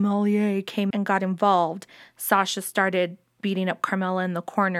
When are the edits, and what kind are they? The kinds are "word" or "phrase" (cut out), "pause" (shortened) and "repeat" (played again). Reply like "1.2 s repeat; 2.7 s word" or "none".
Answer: 0.9 s word